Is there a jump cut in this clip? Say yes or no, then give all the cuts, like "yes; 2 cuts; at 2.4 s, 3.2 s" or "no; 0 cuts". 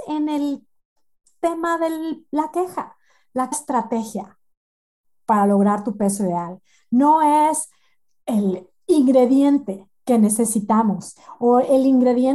yes; 1 cut; at 3.5 s